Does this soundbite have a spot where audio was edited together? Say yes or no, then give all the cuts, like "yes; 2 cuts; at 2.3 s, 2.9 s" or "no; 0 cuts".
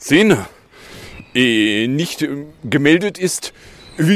no; 0 cuts